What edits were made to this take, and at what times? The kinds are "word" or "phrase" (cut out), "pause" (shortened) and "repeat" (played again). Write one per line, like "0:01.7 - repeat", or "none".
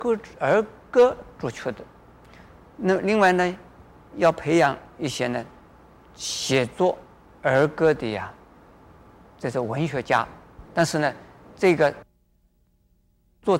none